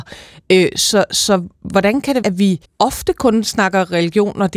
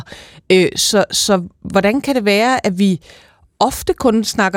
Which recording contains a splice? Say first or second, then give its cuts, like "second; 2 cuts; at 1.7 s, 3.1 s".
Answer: first; 2 cuts; at 2.2 s, 2.6 s